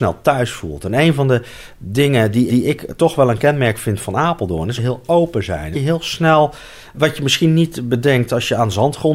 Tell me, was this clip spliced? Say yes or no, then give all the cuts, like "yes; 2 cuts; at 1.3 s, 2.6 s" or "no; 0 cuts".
yes; 4 cuts; at 2.5 s, 4.8 s, 5.7 s, 6.9 s